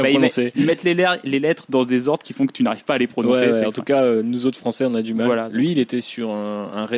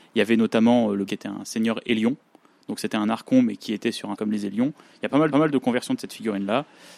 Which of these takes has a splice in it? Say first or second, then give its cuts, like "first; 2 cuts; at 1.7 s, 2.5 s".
second; 3 cuts; at 1.1 s, 4.1 s, 5.3 s